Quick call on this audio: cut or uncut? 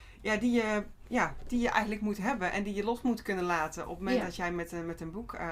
uncut